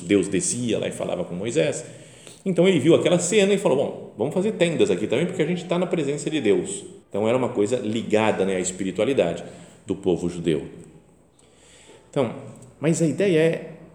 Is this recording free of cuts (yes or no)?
no